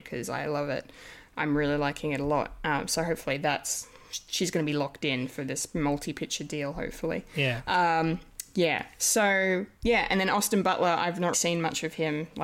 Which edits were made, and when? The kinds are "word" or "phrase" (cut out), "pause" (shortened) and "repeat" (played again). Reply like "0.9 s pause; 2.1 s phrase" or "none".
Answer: 11.3 s word

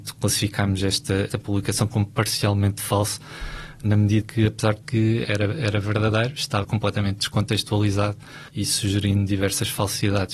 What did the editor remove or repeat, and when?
1.3 s word; 4.2 s word; 4.8 s phrase; 5.2 s word; 6.6 s word; 8.5 s pause

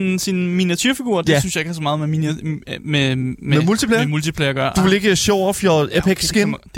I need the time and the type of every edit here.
none

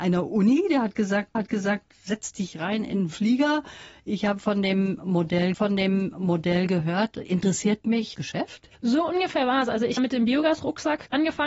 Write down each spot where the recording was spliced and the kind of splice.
1.3 s repeat; 5.5 s repeat; 8.1 s phrase; 8.7 s pause; 10.0 s phrase

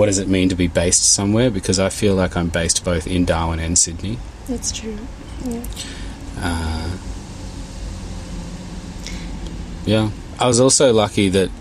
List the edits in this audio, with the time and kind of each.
none

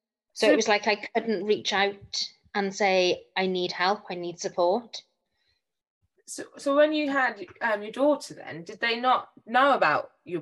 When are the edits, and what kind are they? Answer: none

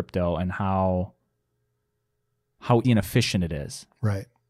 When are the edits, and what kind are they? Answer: 2.8 s word

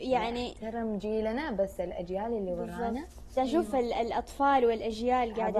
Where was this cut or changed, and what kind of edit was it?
3.4 s word

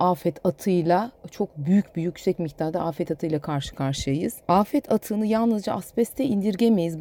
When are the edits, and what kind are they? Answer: 4.4 s pause

